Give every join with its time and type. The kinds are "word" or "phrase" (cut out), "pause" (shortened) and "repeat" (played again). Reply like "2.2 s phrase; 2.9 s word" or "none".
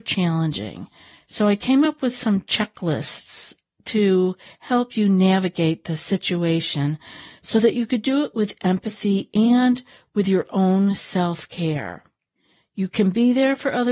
none